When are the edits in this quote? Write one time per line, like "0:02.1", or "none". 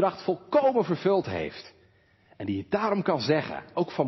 none